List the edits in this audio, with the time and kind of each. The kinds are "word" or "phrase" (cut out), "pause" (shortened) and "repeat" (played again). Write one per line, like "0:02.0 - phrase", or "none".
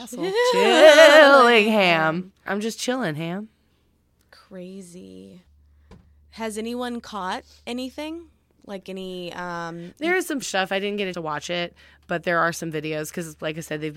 0:02.5 - word
0:10.4 - word
0:11.1 - word